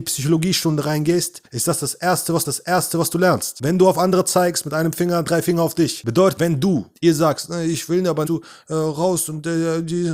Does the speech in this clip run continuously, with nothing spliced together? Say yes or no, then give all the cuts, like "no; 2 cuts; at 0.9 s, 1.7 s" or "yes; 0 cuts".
no; 6 cuts; at 1.5 s, 2.4 s, 5.3 s, 6.4 s, 6.9 s, 8.3 s